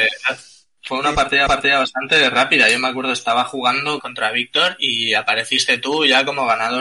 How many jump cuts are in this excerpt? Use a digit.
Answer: 2